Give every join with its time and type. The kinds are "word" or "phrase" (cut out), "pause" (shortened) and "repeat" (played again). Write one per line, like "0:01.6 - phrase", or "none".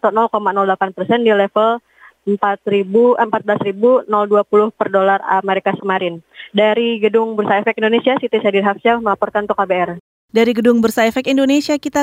0:05.8 - word